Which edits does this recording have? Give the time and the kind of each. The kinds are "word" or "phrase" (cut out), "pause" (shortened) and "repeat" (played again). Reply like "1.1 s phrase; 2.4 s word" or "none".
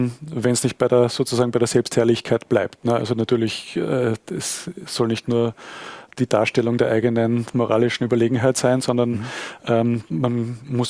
none